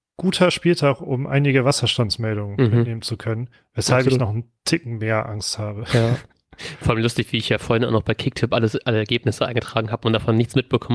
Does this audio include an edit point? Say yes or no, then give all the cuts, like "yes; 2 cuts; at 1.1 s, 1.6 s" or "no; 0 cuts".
no; 0 cuts